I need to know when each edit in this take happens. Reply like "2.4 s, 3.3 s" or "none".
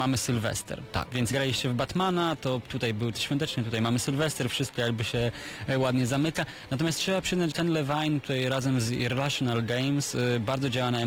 1.3 s, 3.1 s, 7.5 s